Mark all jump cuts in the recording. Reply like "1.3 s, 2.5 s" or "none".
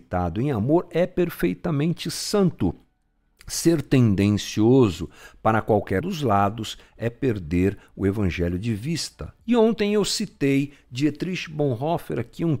6.0 s